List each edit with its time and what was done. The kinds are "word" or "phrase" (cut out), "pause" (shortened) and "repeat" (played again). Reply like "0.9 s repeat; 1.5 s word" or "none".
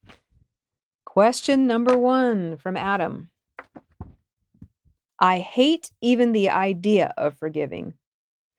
none